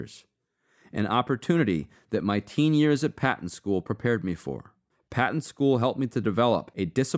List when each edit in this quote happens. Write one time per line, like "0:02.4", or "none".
0:04.9

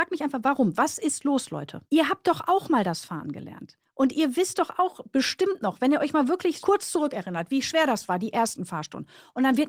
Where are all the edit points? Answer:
0:01.9
0:06.6

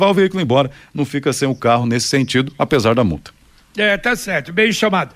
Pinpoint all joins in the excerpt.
none

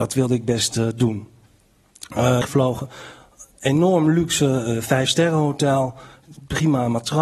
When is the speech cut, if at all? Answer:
0:02.4

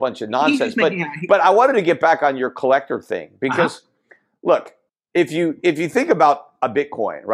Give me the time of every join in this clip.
0:04.9

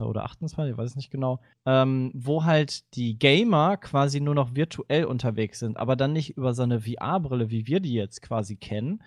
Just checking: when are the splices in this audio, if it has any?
0:01.5

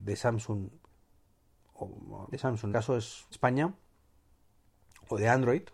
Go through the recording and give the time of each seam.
0:02.3
0:02.7
0:03.3

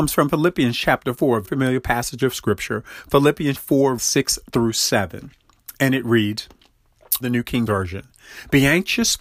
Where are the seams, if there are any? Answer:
0:01.4
0:03.5
0:04.0
0:07.2
0:07.7

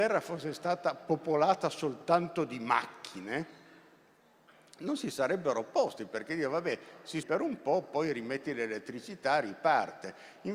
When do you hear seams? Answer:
0:07.2

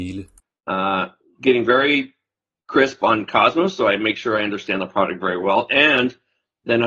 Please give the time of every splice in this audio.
none

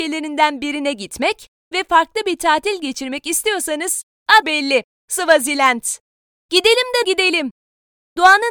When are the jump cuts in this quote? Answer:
0:04.4
0:07.0

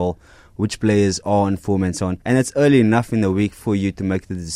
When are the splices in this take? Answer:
0:02.2

